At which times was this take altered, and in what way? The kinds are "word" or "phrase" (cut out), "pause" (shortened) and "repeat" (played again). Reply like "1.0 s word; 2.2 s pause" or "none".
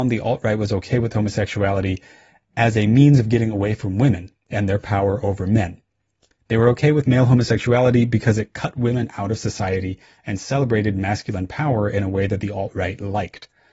none